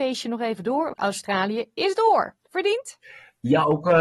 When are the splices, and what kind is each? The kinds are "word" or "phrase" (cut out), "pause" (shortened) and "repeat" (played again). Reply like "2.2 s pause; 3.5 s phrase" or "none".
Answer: 0.9 s word